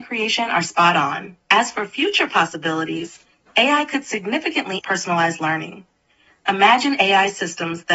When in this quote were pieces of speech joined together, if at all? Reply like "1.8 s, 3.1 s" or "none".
4.8 s

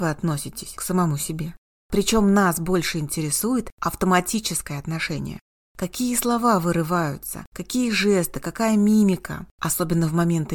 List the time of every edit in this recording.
none

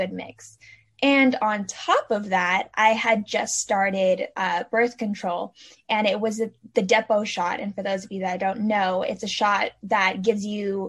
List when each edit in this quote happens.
none

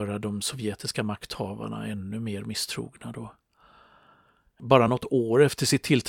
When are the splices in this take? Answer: none

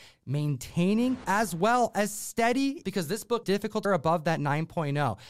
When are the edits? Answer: 1.2 s, 2.8 s, 3.4 s, 3.8 s

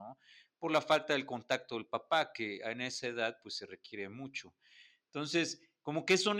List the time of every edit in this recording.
none

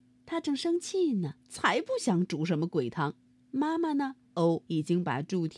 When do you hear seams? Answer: 1.4 s, 3.3 s, 4.3 s, 4.6 s

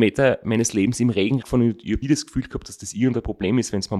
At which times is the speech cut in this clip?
1.4 s, 2.0 s

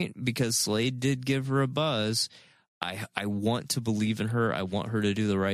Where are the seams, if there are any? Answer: none

